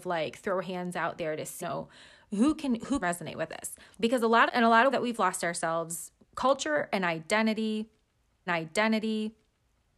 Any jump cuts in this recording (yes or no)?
yes